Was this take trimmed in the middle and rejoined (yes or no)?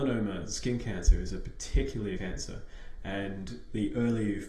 yes